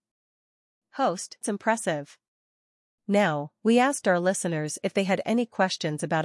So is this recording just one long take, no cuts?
no; 1 cut; at 1.4 s

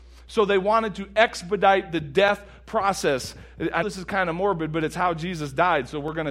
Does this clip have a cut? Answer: yes; 1 cut; at 3.8 s

